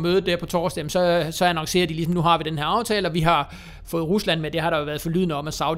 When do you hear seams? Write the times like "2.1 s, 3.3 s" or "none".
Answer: none

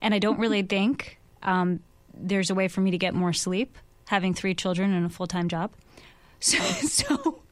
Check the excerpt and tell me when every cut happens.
none

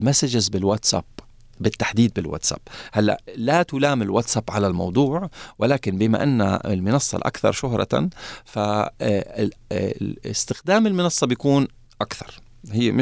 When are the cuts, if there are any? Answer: none

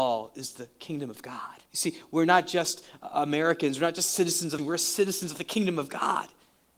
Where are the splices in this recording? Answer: 1.7 s, 4.6 s

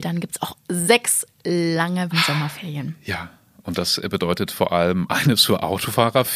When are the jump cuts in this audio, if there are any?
2.1 s

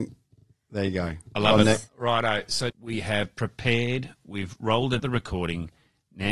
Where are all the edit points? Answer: 1.9 s, 2.7 s, 5.0 s

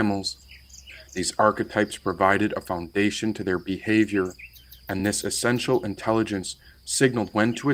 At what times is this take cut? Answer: none

